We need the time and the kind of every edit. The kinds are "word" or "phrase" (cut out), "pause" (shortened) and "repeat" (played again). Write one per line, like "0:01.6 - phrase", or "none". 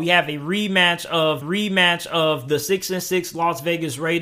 0:01.4 - repeat